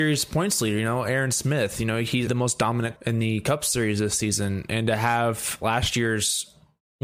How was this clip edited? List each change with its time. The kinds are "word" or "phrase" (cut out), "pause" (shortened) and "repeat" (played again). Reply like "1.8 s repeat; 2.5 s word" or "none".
2.3 s phrase; 3.0 s word